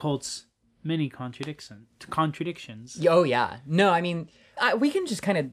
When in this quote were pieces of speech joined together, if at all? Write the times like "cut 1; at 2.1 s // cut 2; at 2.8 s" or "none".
cut 1; at 4.6 s